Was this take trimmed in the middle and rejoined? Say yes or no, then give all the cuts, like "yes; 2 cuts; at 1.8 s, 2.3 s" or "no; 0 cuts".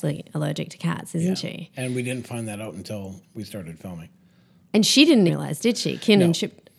yes; 2 cuts; at 3.2 s, 5.3 s